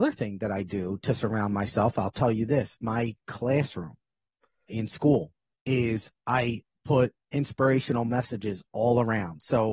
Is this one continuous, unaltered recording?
no; 1 cut; at 4.7 s

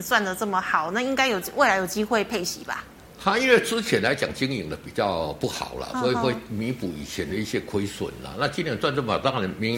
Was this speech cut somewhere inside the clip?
yes; 1 cut; at 3.0 s

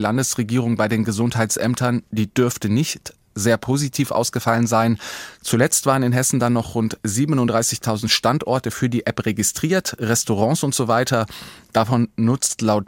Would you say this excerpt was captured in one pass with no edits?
yes; 0 cuts

